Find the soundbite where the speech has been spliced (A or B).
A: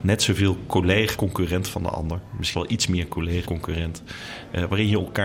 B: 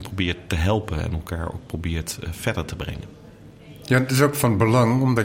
A